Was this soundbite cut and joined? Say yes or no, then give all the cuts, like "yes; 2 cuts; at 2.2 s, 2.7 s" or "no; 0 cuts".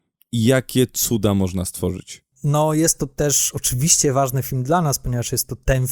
no; 0 cuts